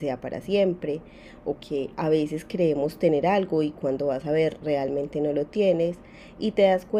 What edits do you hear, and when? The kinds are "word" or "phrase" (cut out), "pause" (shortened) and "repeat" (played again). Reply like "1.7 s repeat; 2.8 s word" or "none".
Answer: none